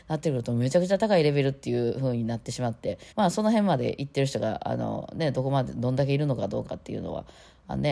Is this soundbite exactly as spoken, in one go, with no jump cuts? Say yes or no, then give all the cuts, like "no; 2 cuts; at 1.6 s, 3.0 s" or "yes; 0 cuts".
no; 1 cut; at 3.1 s